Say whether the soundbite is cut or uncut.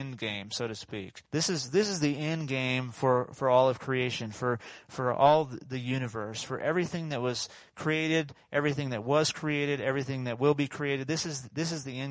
cut